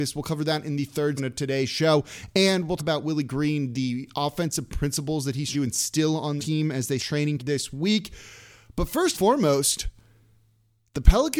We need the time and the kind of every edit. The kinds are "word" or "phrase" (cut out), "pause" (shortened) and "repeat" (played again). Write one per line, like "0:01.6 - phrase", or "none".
0:01.2 - word
0:02.8 - word
0:05.5 - word
0:06.4 - word
0:07.0 - word
0:07.4 - word
0:09.1 - word